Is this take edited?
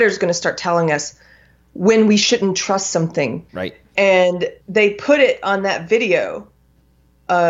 yes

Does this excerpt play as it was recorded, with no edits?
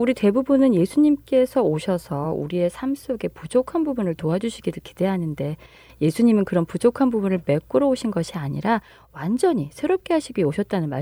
yes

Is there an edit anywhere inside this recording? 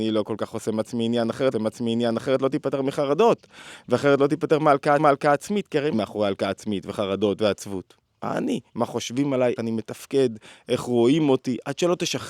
yes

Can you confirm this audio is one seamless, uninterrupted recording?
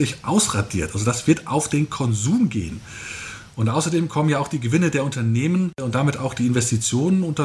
yes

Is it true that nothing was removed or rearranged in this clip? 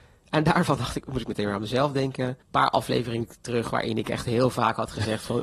no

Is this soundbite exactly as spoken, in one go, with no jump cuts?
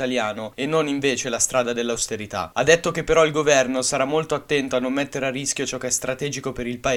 yes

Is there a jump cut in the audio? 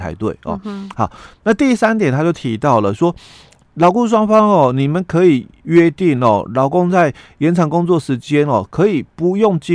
no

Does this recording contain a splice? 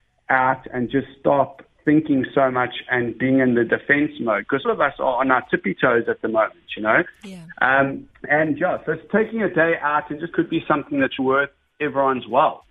yes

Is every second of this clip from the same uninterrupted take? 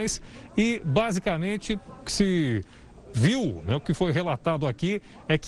yes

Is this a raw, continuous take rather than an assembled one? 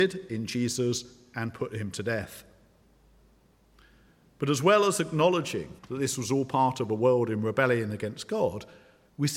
no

